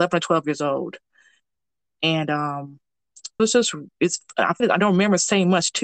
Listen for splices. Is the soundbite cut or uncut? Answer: cut